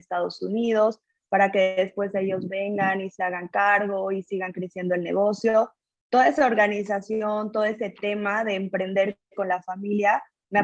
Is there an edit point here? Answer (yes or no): no